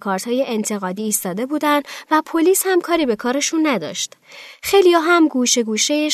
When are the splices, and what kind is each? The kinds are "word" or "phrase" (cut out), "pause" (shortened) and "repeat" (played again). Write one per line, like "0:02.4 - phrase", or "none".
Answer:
none